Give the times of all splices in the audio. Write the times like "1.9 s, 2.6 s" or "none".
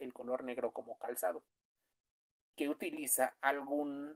2.5 s

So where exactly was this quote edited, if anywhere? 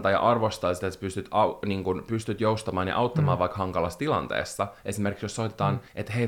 none

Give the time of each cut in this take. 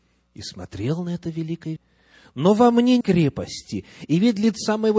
1.8 s, 3.0 s

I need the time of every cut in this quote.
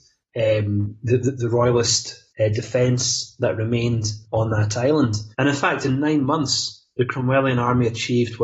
2.3 s, 4.2 s, 5.3 s

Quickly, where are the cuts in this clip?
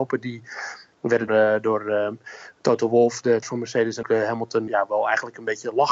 1.3 s, 3.4 s, 4.0 s, 4.7 s

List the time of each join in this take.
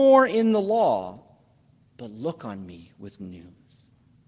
3.2 s

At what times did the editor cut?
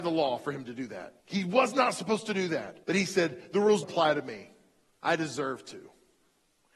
1.2 s, 2.8 s, 3.8 s

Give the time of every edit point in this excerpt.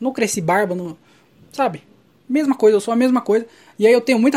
none

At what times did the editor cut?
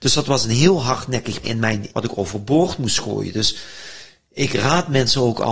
1.4 s, 1.9 s

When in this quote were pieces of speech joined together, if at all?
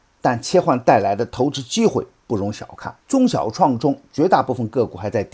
3.0 s

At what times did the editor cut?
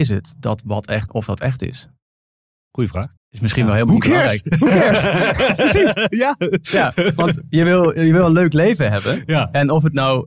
1.1 s, 2.4 s, 3.2 s

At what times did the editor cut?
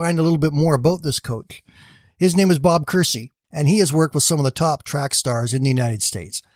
none

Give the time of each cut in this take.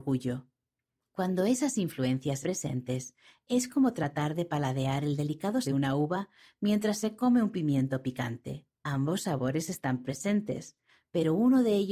2.4 s, 5.6 s, 8.7 s

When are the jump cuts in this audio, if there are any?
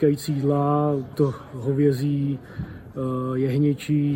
1.1 s

